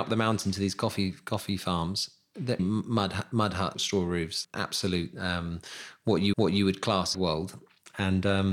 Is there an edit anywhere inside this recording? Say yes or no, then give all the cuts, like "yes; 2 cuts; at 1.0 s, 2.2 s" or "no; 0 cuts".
yes; 5 cuts; at 2.6 s, 3.7 s, 4.4 s, 6.3 s, 7.1 s